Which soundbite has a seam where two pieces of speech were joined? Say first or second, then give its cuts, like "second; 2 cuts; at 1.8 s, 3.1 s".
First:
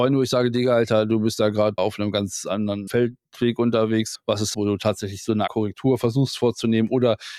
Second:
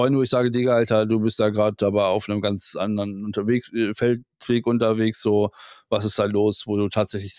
first; 5 cuts; at 1.8 s, 2.9 s, 4.1 s, 4.5 s, 5.5 s